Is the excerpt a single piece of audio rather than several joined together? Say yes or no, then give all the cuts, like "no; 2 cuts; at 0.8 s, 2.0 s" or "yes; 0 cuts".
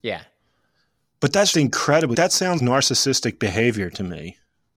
no; 3 cuts; at 1.5 s, 2.1 s, 2.6 s